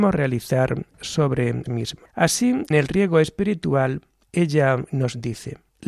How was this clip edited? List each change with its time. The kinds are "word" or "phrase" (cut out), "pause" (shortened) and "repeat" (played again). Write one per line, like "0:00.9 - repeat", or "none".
0:01.7 - word
0:02.7 - word